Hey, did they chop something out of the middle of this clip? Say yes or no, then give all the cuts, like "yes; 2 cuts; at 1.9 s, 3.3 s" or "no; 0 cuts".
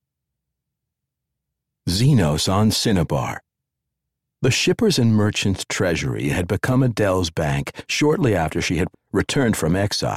yes; 1 cut; at 8.9 s